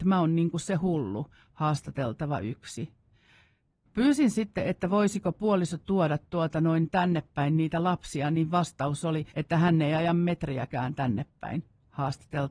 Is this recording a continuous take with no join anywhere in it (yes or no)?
no